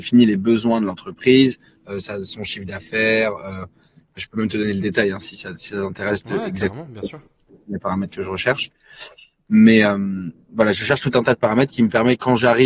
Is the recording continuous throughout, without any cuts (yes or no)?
yes